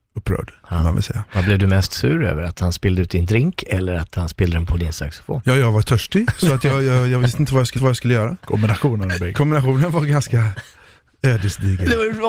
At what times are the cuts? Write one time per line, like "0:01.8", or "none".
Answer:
0:07.8